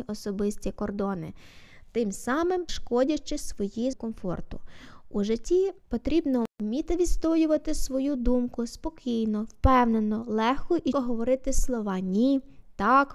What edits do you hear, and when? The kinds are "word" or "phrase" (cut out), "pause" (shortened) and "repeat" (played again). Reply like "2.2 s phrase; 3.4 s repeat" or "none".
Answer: 2.7 s word; 3.9 s word; 5.8 s pause; 10.9 s word